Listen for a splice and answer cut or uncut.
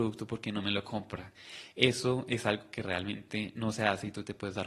uncut